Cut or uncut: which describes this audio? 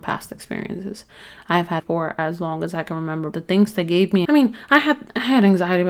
cut